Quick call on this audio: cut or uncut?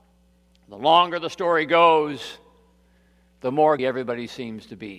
cut